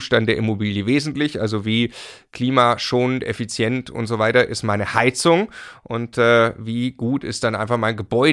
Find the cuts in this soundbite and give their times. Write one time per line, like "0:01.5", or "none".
none